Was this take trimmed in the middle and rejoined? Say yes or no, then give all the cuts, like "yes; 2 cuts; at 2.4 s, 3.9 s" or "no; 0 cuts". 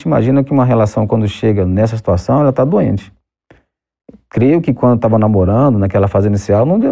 no; 0 cuts